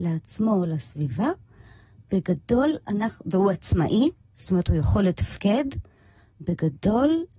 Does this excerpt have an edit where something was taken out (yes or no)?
no